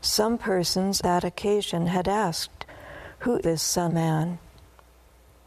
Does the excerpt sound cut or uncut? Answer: cut